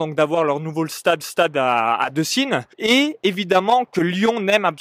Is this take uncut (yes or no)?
no